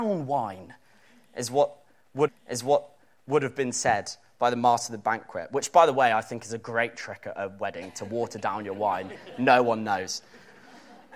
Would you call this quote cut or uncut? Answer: cut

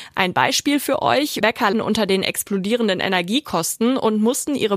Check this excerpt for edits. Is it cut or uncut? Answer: cut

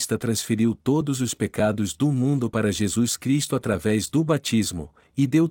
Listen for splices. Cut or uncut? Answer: uncut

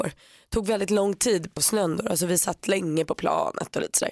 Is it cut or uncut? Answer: cut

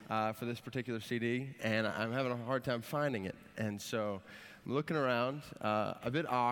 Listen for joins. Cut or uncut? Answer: uncut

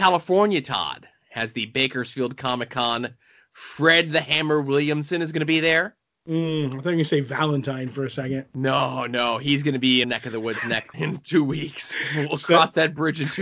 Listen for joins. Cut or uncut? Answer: cut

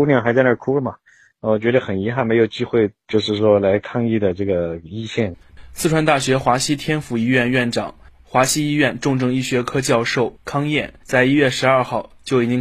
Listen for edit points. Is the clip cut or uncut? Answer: uncut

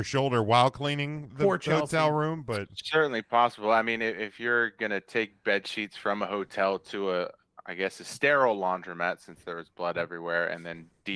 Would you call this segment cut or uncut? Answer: cut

